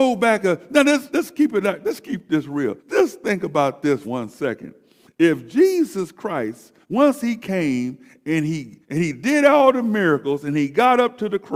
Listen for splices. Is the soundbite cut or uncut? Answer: cut